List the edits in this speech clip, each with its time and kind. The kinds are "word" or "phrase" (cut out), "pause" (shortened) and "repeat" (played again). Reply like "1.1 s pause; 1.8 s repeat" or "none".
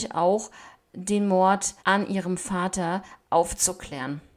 1.8 s pause